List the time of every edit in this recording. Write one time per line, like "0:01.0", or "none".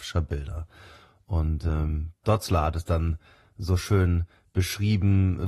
0:02.2

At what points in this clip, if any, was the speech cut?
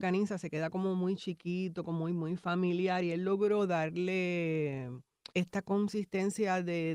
0:05.3

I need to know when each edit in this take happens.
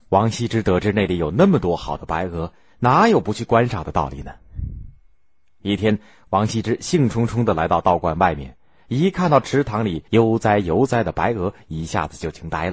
0:10.1

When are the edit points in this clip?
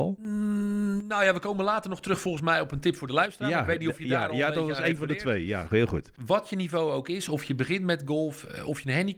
none

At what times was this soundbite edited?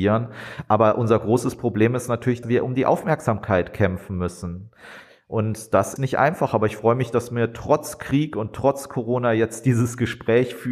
0:02.4
0:06.0

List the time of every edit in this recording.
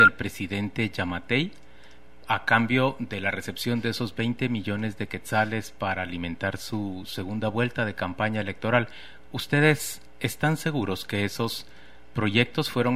none

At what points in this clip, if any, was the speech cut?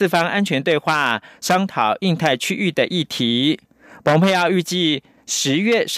none

